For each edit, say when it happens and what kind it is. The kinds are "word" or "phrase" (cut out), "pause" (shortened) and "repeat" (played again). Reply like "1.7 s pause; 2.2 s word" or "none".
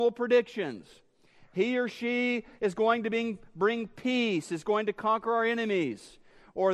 none